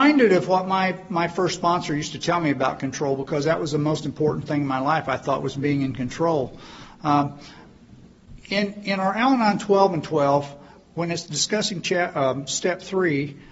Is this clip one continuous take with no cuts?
yes; 0 cuts

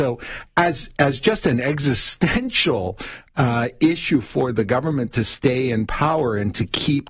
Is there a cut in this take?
no; 0 cuts

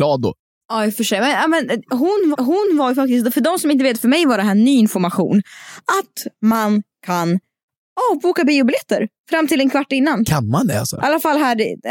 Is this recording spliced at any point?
yes; 1 cut; at 2.3 s

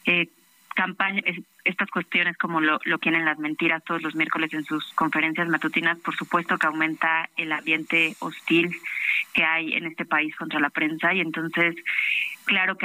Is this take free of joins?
no; 2 cuts; at 1.2 s, 3.0 s

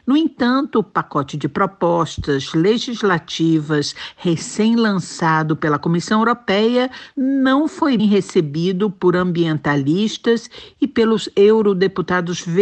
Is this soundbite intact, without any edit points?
no; 1 cut; at 8.0 s

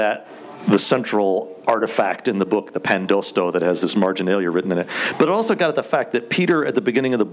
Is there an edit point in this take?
no; 0 cuts

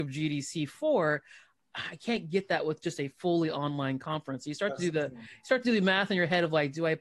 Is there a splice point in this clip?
no; 0 cuts

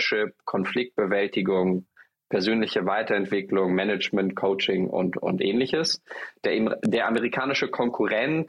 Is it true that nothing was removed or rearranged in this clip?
yes; 0 cuts

